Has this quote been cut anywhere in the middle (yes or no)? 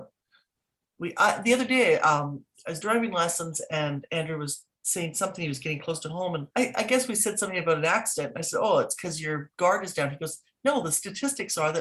yes